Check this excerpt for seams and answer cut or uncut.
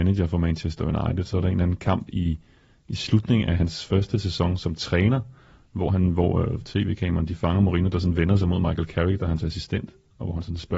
uncut